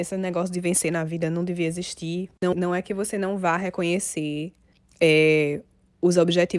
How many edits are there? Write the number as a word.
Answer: two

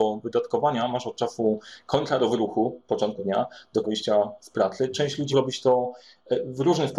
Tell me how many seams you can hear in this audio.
three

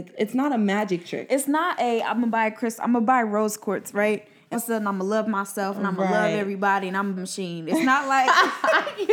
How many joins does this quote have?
two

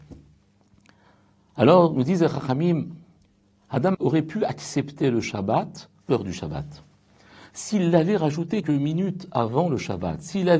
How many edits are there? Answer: three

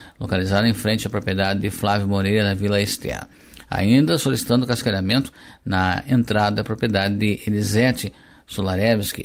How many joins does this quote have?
zero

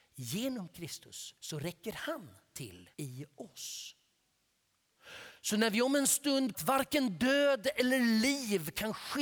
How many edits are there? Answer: three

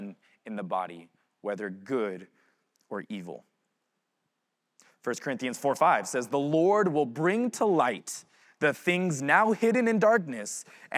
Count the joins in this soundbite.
zero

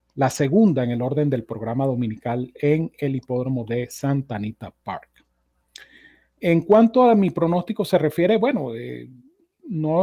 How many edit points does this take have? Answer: zero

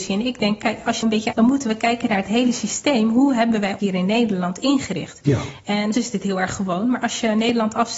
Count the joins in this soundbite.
four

